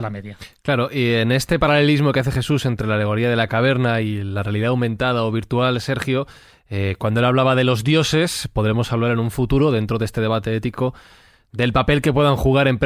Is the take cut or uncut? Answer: uncut